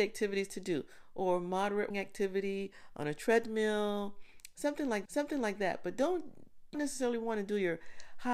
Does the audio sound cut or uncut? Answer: cut